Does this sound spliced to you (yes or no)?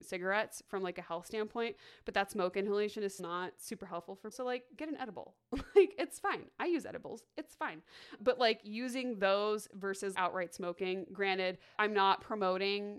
yes